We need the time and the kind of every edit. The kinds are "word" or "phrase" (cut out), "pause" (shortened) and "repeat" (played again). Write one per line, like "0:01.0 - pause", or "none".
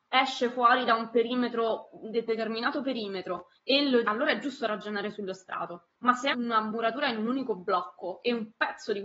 0:02.3 - phrase
0:03.6 - pause
0:04.0 - phrase
0:05.9 - pause
0:06.3 - word